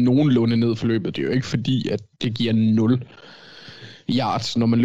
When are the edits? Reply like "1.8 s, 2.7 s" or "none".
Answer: 2.1 s

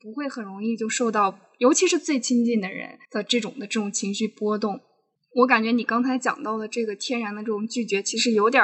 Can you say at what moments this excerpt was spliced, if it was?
3.0 s

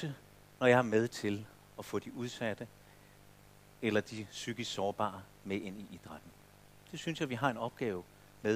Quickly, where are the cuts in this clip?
none

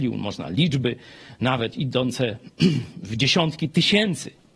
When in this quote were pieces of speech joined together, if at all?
none

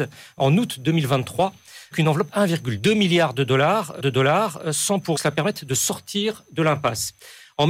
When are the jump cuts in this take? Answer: 1.9 s, 2.3 s, 4.0 s, 5.2 s

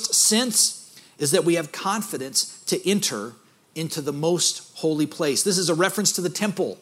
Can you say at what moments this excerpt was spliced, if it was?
none

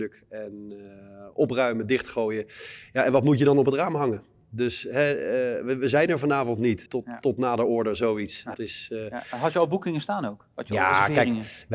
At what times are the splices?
6.9 s, 8.5 s

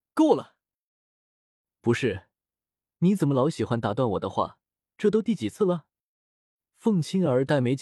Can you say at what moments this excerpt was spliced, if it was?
none

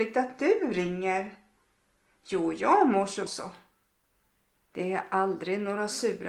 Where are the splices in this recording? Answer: 3.3 s

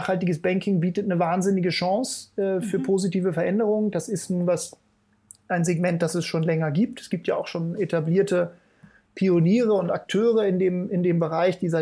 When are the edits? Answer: none

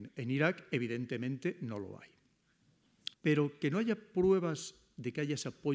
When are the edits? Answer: 3.1 s

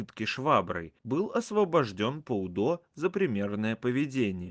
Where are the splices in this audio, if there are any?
1.0 s

